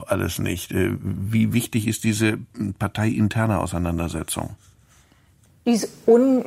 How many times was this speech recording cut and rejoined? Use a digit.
1